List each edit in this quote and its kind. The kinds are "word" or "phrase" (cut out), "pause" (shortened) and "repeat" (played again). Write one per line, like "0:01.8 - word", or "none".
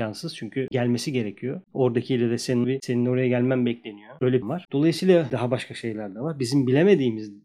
0:02.6 - word
0:04.4 - word
0:05.3 - word

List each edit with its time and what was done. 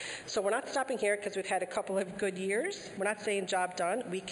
none

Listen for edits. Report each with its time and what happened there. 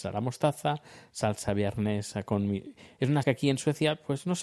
0:03.2 - word

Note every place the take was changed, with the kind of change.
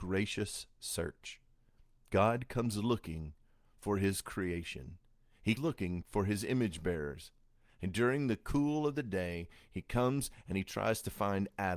0:05.6 - word

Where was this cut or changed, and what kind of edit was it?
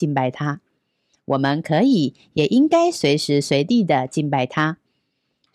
none

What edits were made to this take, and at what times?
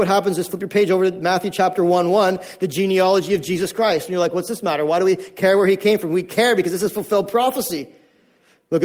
none

